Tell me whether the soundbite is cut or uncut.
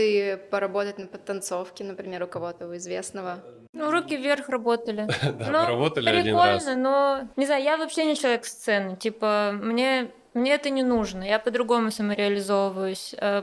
cut